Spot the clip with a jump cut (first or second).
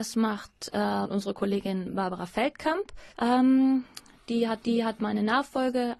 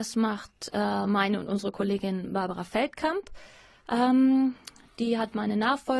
first